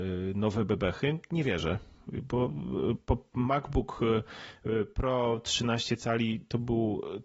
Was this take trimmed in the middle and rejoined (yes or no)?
no